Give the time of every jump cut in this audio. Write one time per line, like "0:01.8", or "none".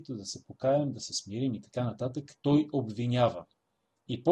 none